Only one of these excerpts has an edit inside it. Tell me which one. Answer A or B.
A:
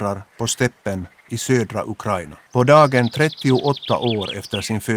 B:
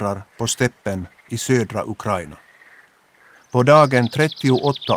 A